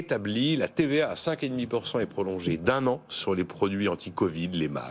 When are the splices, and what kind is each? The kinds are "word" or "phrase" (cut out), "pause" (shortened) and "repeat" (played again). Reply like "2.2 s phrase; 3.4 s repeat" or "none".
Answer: none